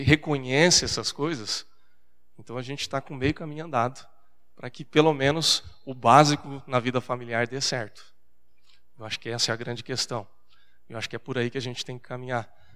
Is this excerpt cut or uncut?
uncut